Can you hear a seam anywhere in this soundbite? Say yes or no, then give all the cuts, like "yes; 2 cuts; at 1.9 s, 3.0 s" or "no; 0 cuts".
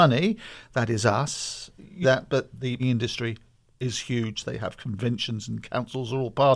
yes; 2 cuts; at 2.0 s, 2.8 s